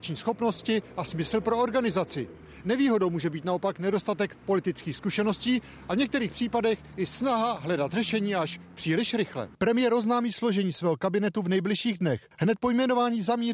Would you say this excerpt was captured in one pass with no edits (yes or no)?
yes